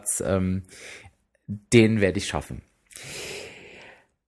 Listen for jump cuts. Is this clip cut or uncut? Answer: uncut